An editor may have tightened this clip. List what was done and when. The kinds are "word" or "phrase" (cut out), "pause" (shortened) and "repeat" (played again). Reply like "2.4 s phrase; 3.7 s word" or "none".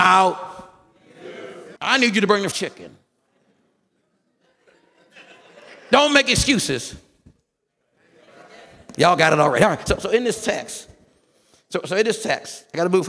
1.8 s pause; 2.5 s word